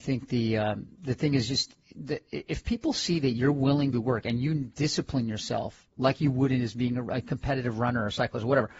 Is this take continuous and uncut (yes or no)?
no